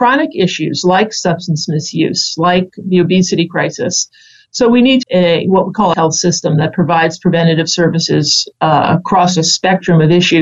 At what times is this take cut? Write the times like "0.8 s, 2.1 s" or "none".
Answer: 5.0 s, 5.9 s